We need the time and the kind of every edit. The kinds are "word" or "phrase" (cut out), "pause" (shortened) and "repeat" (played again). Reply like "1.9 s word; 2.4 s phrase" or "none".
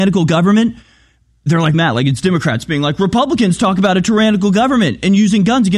1.7 s word